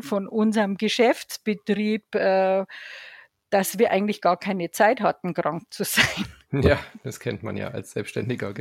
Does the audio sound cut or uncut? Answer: uncut